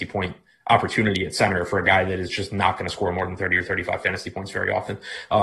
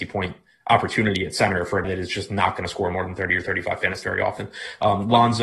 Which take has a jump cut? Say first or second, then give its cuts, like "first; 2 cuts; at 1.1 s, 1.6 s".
second; 2 cuts; at 1.8 s, 4.0 s